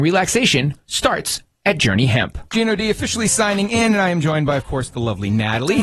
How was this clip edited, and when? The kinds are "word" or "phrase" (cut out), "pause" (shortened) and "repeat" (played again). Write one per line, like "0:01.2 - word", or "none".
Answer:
0:02.5 - pause

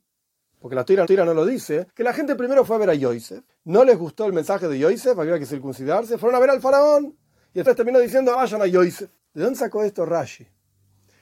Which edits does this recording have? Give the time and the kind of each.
0:01.0 - repeat
0:01.9 - pause
0:03.5 - pause
0:07.7 - word
0:08.3 - word
0:09.2 - pause

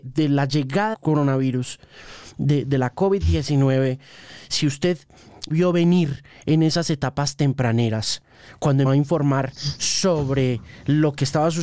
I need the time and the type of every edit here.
0:00.9 - word
0:02.6 - word
0:05.5 - word
0:08.8 - word

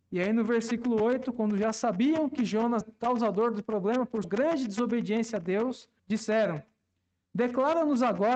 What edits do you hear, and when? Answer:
0:02.8 - word
0:04.2 - word
0:06.0 - pause

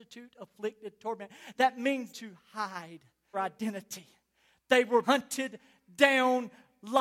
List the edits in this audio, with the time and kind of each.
0:02.1 - phrase
0:03.3 - word
0:05.0 - word

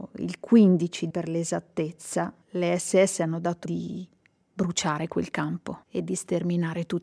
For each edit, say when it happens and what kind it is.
0:01.1 - word
0:02.4 - pause
0:03.6 - word
0:05.8 - pause

